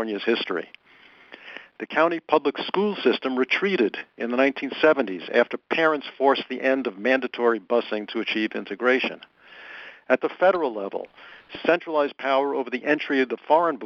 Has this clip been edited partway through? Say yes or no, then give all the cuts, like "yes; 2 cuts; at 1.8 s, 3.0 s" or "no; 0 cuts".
no; 0 cuts